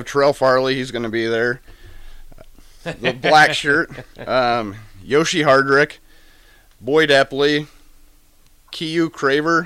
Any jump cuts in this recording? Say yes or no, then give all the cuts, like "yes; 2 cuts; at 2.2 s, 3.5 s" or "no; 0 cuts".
no; 0 cuts